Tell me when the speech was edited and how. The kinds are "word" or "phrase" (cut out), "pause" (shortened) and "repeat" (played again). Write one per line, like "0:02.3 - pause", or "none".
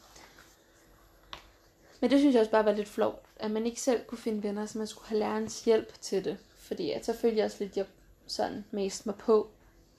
none